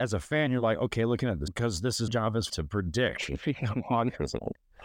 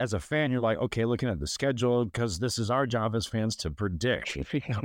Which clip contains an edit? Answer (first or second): first